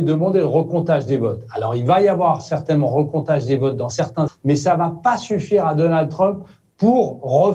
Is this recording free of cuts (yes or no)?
no